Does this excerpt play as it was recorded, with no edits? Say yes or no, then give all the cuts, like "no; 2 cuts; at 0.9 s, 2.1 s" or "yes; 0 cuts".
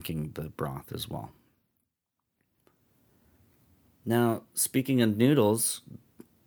yes; 0 cuts